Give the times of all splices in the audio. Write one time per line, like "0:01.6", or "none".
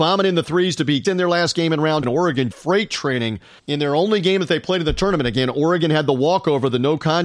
0:01.0
0:02.0
0:02.5
0:03.6